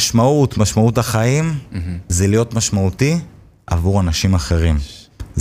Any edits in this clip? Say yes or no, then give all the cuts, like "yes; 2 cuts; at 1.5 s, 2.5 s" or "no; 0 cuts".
no; 0 cuts